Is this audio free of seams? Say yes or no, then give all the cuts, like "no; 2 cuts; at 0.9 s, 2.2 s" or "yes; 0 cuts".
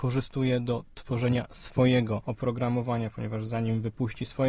yes; 0 cuts